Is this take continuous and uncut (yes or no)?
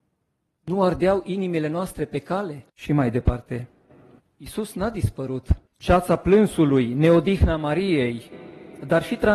no